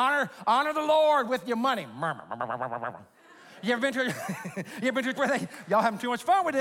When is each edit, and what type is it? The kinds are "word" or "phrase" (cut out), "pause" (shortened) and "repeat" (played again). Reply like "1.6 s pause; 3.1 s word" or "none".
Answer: 5.1 s word

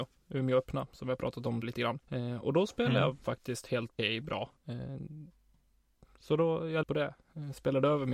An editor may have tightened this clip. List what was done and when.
1.6 s word; 2.0 s pause; 4.0 s word; 4.6 s pause; 6.8 s phrase

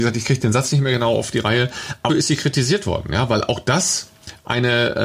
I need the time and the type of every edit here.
2.1 s word

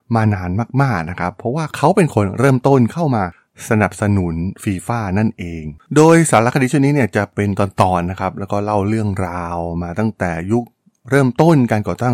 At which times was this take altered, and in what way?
5.8 s pause

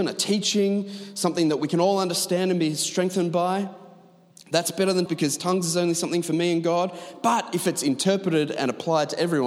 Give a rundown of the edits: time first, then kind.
5.1 s word

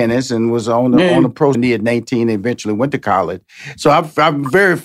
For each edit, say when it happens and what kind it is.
1.5 s phrase

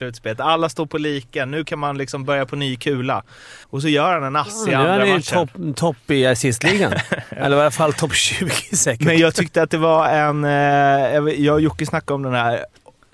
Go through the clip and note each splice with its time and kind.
3.6 s pause

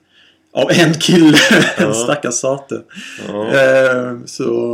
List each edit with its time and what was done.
1.8 s word

